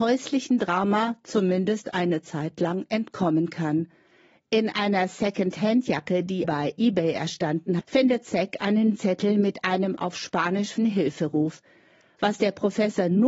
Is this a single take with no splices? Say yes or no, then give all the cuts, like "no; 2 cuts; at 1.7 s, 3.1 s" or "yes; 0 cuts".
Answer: no; 4 cuts; at 6.4 s, 7.8 s, 9.0 s, 10.8 s